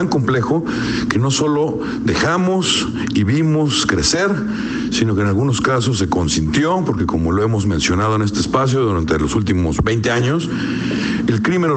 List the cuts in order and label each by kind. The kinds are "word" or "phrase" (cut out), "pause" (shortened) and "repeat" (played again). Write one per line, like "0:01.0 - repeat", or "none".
none

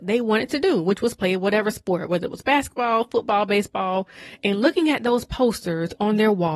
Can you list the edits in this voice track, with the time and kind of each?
none

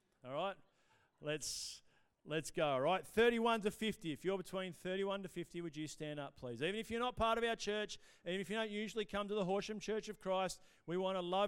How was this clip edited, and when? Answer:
none

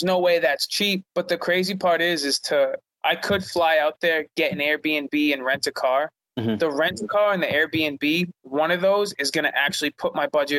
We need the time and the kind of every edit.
0:01.1 - pause
0:08.4 - pause

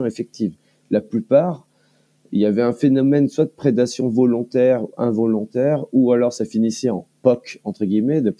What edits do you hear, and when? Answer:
none

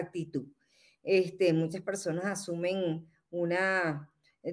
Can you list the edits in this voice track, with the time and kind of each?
none

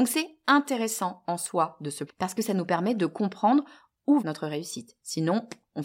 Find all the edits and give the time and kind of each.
0:02.1 - word
0:04.2 - phrase

